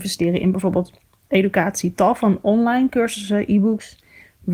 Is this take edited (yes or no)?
no